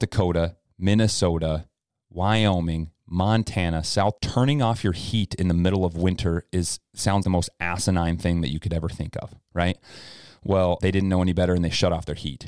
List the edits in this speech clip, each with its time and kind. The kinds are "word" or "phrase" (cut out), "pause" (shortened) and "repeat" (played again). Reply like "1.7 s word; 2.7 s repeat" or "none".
4.2 s word; 7.2 s word; 10.8 s word